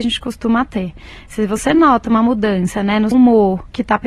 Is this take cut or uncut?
cut